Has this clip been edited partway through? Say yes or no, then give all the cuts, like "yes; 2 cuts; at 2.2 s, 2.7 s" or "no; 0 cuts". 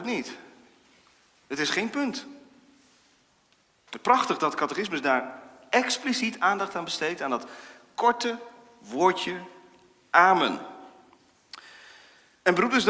no; 0 cuts